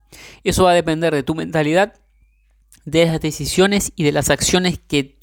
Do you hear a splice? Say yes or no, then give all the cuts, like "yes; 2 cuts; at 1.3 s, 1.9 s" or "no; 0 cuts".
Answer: no; 0 cuts